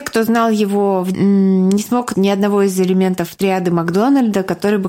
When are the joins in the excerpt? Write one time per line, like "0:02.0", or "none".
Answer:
0:01.1
0:02.1